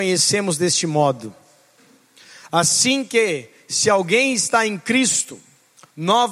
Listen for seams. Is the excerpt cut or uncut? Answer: uncut